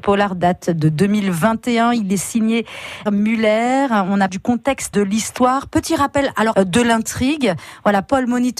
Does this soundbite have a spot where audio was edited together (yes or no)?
yes